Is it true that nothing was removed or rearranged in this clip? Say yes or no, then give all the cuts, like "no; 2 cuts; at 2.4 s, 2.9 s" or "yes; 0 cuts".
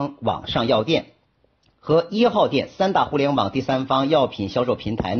yes; 0 cuts